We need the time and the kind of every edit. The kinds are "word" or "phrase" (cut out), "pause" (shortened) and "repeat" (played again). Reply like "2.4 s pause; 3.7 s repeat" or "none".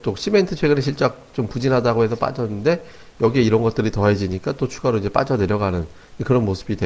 none